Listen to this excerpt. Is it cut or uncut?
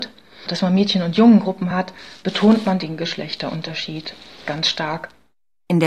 uncut